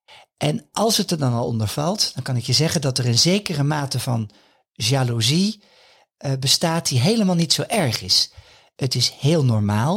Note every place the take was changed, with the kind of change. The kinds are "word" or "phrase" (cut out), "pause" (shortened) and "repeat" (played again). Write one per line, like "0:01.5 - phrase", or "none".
none